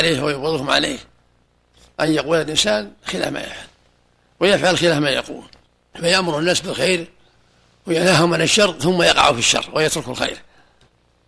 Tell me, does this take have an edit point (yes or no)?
no